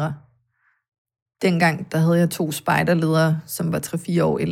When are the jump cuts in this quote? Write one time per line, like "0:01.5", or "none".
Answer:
none